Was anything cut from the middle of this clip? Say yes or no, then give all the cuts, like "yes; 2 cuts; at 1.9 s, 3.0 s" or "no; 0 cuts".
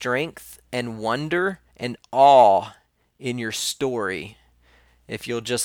no; 0 cuts